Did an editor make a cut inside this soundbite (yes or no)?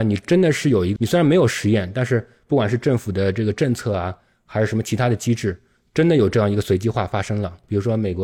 yes